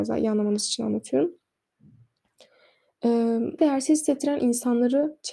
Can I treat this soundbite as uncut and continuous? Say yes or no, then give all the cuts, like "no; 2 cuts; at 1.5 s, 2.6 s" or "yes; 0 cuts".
no; 1 cut; at 3.6 s